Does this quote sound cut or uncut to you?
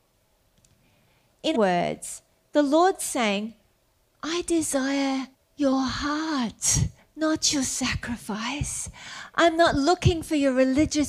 cut